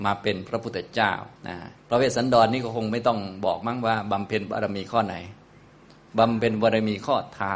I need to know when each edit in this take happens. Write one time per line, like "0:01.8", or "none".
0:01.4
0:01.8